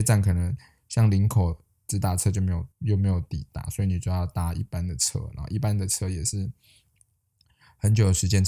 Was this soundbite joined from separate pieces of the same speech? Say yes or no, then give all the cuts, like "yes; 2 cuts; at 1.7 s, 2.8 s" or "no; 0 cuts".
yes; 1 cut; at 2.7 s